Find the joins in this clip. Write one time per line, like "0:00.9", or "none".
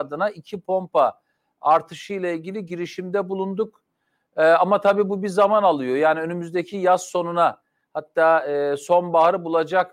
none